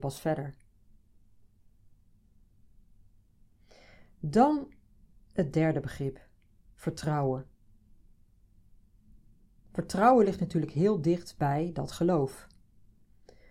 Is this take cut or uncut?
uncut